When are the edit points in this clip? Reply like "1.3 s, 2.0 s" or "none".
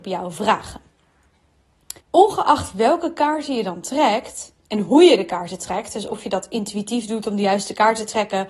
2.0 s, 4.6 s